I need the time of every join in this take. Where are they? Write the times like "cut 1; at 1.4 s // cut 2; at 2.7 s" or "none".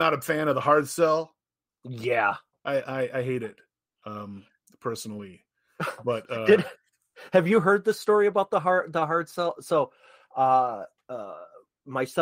none